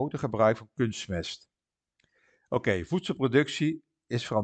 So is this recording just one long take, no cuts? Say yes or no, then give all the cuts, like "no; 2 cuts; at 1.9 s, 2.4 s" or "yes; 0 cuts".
no; 1 cut; at 1.8 s